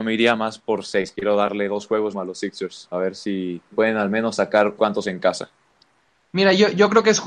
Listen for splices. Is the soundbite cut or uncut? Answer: cut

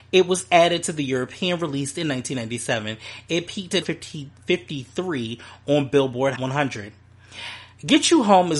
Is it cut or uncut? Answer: cut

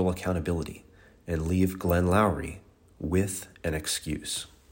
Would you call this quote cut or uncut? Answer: uncut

